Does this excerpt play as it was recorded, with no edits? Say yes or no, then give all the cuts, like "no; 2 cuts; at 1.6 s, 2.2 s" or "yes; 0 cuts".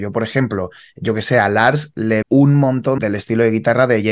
no; 2 cuts; at 2.2 s, 3.0 s